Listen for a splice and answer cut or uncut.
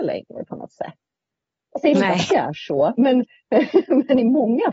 cut